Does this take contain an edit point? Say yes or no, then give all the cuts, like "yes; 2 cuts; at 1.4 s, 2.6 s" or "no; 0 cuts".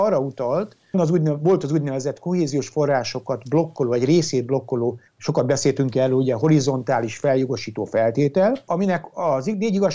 yes; 2 cuts; at 0.9 s, 5.1 s